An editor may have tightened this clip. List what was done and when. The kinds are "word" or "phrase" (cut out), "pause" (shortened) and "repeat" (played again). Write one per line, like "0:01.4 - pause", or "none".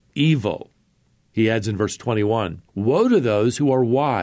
0:02.7 - pause

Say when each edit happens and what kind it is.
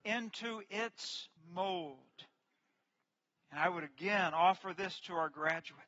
0:01.4 - pause

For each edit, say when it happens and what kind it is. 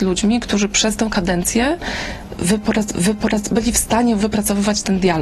0:02.9 - repeat
0:04.2 - word

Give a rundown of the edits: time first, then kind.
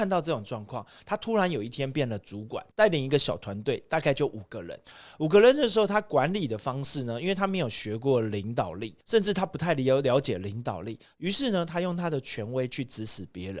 0:02.7 - pause
0:09.0 - pause

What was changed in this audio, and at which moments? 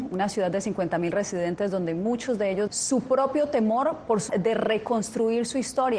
0:02.7 - word
0:04.3 - word

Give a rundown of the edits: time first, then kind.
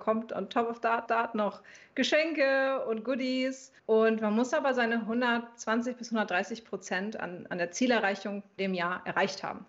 0:01.1 - repeat
0:03.8 - pause
0:08.6 - word

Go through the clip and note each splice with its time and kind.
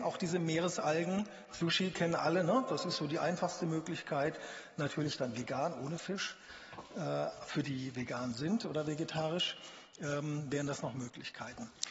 0:07.6 - word

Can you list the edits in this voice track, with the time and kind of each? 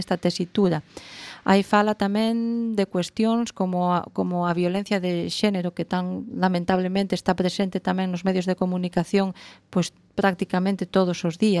none

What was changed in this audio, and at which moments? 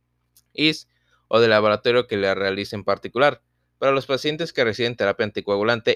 none

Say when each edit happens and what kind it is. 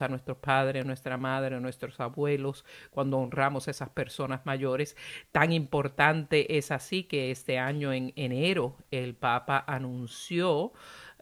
none

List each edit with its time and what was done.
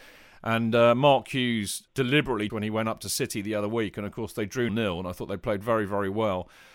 0:01.9 - word
0:02.5 - phrase
0:04.7 - word

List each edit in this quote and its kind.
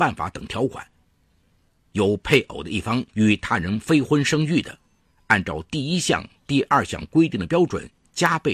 0:03.1 - pause

